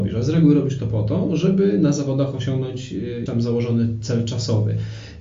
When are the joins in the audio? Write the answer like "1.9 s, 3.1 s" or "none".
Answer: 3.3 s